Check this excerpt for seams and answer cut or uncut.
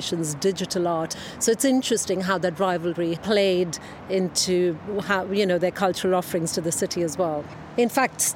cut